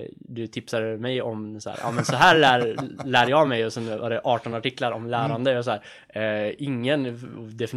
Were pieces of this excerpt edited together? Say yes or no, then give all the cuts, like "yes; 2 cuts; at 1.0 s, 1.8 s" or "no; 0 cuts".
no; 0 cuts